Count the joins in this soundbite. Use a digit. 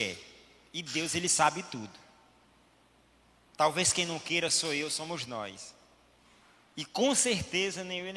0